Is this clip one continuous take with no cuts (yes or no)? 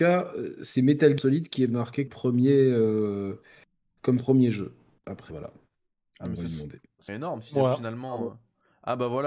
no